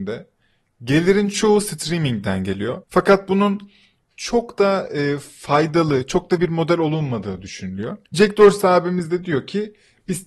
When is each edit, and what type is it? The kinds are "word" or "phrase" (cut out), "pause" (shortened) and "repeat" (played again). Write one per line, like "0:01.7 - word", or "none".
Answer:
0:02.8 - pause
0:06.4 - word
0:08.0 - pause